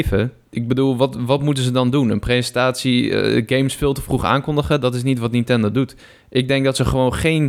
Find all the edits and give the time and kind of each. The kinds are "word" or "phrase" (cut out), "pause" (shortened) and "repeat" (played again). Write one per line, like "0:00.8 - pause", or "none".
none